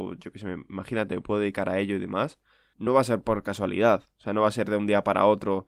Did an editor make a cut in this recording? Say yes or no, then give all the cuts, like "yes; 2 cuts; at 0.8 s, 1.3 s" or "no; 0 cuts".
no; 0 cuts